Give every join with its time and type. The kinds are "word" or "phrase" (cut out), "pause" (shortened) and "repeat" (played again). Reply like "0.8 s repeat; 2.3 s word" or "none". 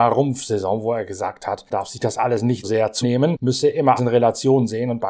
1.7 s word; 2.6 s word; 3.0 s word; 4.0 s word

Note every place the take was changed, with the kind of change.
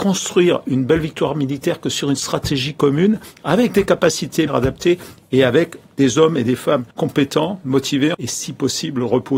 4.5 s word; 6.9 s pause; 8.1 s word

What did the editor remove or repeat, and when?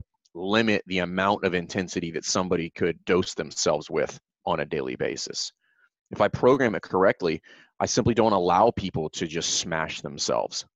3.0 s pause

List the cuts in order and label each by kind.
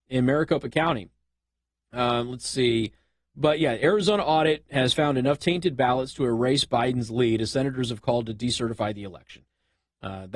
none

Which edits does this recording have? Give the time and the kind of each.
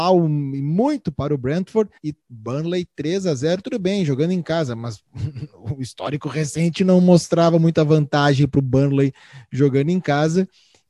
2.0 s pause

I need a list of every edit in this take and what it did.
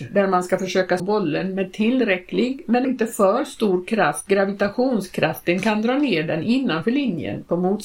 1.0 s word; 2.8 s word; 4.3 s phrase

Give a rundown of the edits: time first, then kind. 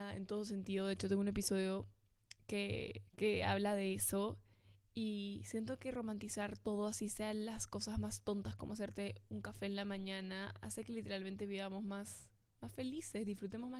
3.1 s pause

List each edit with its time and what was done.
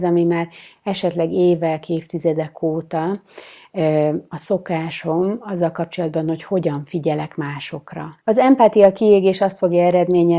8.2 s pause

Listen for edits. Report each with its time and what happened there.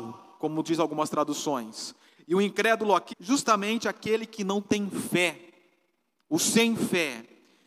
3.1 s word

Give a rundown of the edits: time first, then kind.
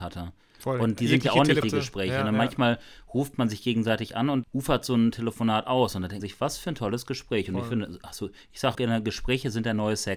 1.6 s word; 4.4 s word; 6.2 s word; 8.7 s word

